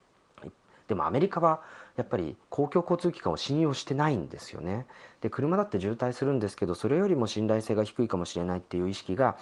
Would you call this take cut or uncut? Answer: cut